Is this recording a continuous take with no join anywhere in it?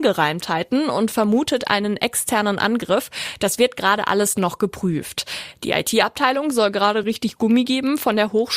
yes; 0 cuts

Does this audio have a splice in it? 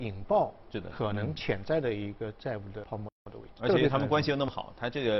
yes; 1 cut; at 3.6 s

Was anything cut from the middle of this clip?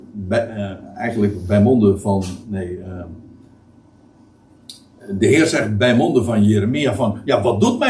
no; 0 cuts

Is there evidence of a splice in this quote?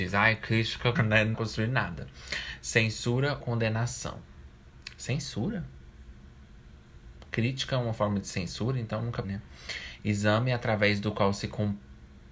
yes; 4 cuts; at 1.0 s, 1.3 s, 3.4 s, 9.2 s

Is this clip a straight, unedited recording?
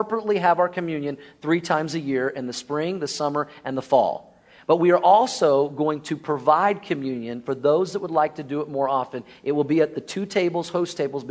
yes; 0 cuts

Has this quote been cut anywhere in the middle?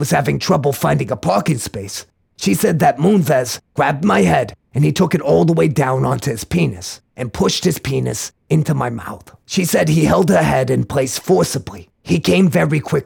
yes; 2 cuts; at 9.4 s, 11.9 s

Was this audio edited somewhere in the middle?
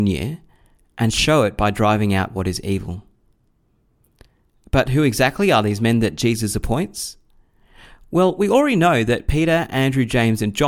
no; 0 cuts

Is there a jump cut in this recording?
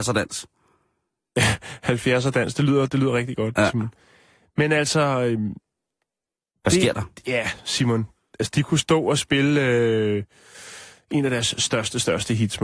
no; 0 cuts

